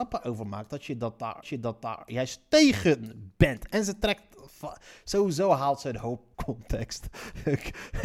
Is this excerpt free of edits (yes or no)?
no